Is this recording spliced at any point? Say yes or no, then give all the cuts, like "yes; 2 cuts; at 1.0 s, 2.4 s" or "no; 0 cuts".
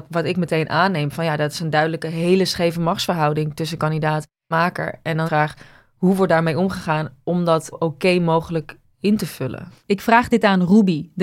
yes; 4 cuts; at 4.5 s, 5.3 s, 7.7 s, 9.8 s